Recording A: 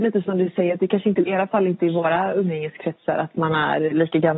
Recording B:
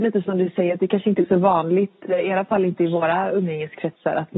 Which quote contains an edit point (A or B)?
A